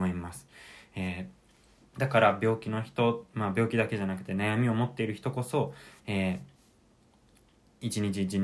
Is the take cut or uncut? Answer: uncut